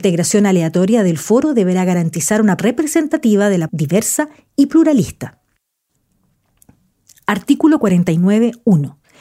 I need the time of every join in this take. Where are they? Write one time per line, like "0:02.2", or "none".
0:02.6
0:03.7

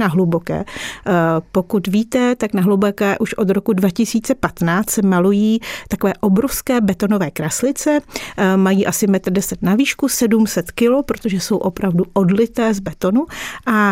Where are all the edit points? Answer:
none

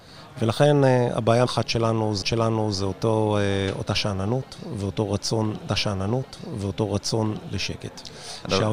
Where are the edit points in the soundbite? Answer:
0:01.5
0:02.2
0:05.7

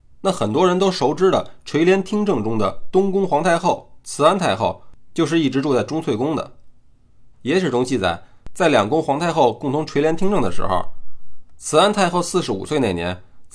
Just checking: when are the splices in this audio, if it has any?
0:07.3

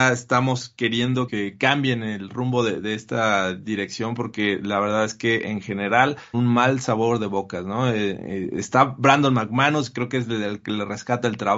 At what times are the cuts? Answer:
0:01.3
0:06.3

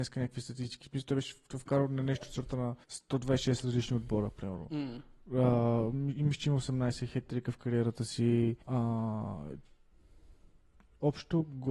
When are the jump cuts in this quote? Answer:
0:02.8
0:08.6

